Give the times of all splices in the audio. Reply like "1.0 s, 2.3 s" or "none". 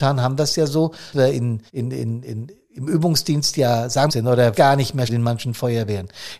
1.1 s, 1.7 s, 2.2 s, 4.1 s, 4.5 s, 5.1 s